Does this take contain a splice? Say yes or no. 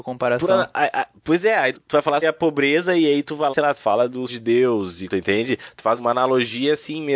yes